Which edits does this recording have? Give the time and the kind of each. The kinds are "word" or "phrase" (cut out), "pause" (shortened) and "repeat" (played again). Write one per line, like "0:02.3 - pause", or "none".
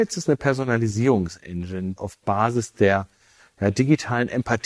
0:02.0 - phrase